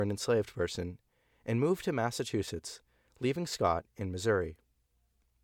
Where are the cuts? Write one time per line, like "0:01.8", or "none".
none